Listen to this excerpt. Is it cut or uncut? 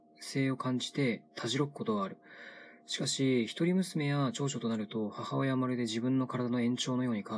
cut